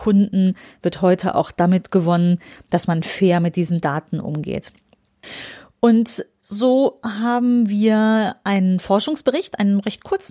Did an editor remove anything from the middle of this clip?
no; 0 cuts

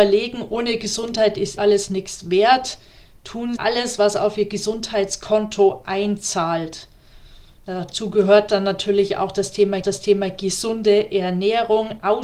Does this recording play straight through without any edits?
no; 3 cuts; at 1.6 s, 3.6 s, 9.8 s

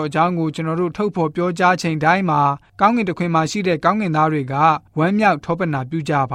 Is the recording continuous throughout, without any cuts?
yes; 0 cuts

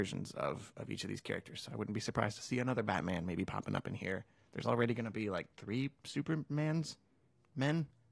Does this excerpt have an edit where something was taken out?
no; 0 cuts

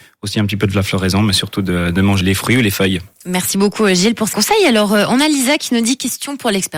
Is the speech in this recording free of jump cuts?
no; 2 cuts; at 2.2 s, 4.3 s

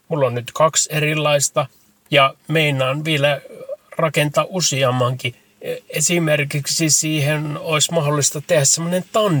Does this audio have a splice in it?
no; 0 cuts

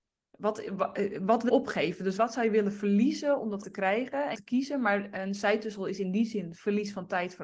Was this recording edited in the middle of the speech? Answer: yes; 3 cuts; at 1.5 s, 3.6 s, 4.3 s

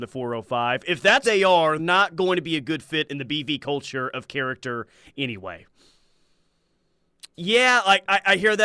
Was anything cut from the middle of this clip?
yes; 2 cuts; at 1.2 s, 1.8 s

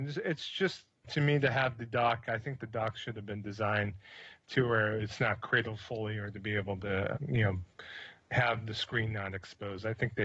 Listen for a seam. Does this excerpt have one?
yes; 2 cuts; at 1.0 s, 7.2 s

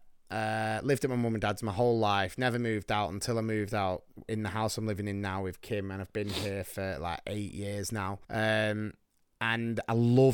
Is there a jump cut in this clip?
yes; 1 cut; at 8.2 s

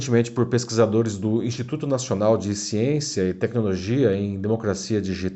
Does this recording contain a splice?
no; 0 cuts

